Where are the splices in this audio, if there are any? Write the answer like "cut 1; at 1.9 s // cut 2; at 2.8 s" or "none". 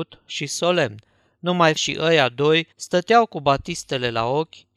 cut 1; at 1.8 s // cut 2; at 2.7 s